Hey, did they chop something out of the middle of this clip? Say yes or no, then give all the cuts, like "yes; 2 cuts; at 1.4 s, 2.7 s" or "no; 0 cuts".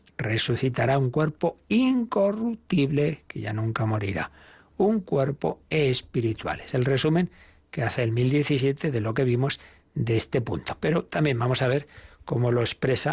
no; 0 cuts